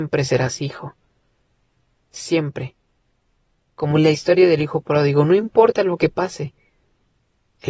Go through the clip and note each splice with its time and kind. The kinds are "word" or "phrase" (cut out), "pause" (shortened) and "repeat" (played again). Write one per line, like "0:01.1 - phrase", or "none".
none